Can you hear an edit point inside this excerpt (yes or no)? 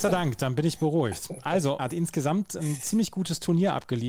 yes